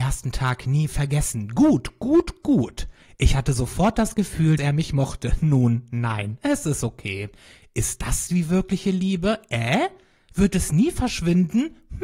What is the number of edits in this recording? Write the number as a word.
one